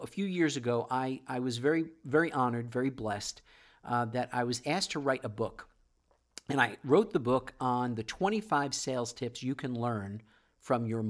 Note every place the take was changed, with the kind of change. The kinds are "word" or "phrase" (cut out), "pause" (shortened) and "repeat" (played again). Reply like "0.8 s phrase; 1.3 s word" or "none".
none